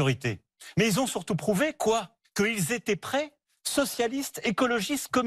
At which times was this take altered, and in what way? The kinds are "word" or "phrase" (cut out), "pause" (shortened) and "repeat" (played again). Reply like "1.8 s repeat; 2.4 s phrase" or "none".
none